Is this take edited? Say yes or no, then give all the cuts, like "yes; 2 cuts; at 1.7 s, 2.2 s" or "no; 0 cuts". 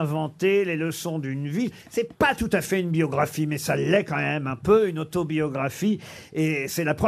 no; 0 cuts